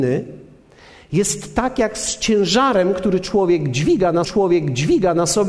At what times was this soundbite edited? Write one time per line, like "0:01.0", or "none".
0:04.2